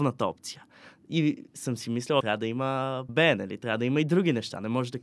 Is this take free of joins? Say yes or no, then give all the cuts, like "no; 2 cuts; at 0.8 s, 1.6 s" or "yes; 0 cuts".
no; 2 cuts; at 2.2 s, 3.1 s